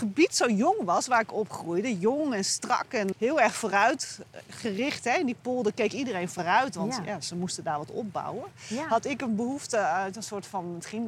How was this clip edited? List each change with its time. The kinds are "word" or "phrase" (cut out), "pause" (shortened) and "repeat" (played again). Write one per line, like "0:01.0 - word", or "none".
0:03.1 - word

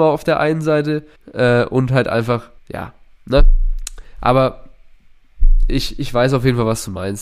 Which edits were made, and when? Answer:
0:01.2 - pause
0:02.6 - pause

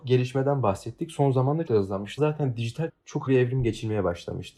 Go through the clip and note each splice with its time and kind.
0:01.7 - word
0:02.2 - word
0:02.9 - word
0:03.3 - word

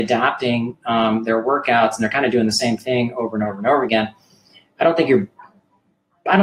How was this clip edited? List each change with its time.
none

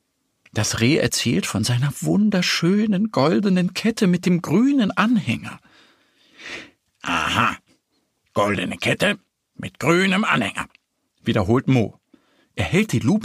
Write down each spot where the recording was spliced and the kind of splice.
none

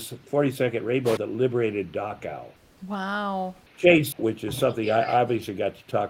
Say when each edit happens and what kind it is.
0:01.2 - word
0:03.7 - word
0:04.1 - word

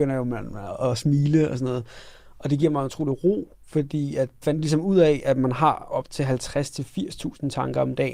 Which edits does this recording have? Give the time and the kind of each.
0:04.4 - word

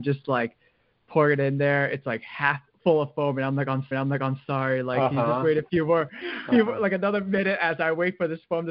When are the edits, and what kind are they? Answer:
0:03.9 - repeat

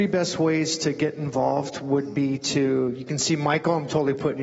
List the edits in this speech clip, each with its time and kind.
none

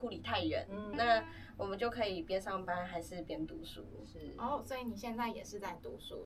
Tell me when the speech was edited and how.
0:00.9 - word

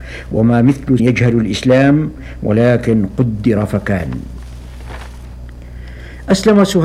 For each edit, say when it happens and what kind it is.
0:01.0 - word

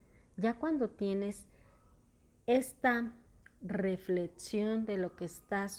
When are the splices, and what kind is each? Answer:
none

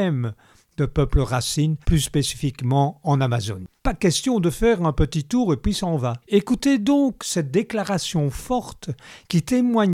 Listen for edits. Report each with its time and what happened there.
0:01.8 - pause
0:03.8 - pause
0:06.2 - pause

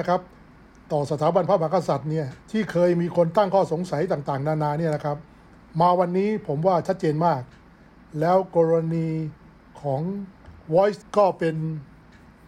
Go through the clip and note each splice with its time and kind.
0:02.4 - pause
0:11.0 - phrase

